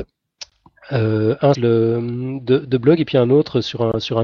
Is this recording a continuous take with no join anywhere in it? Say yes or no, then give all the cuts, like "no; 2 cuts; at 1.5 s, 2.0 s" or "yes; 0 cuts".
no; 1 cut; at 1.5 s